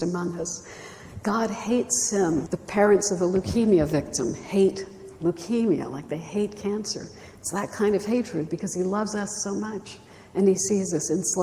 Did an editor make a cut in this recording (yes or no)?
yes